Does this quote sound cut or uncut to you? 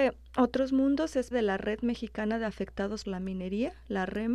cut